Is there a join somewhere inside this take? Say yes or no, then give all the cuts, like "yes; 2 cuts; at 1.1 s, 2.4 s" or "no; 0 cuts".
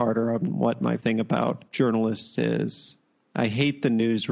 yes; 1 cut; at 1.0 s